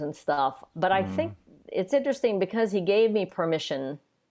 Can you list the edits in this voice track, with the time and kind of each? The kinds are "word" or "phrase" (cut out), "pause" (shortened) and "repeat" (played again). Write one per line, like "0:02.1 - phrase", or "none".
none